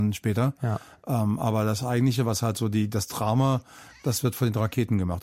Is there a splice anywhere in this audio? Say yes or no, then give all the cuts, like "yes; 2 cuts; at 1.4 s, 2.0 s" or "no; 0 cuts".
no; 0 cuts